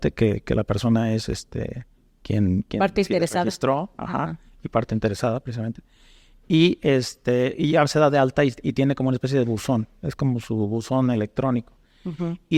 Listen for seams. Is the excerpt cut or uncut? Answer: uncut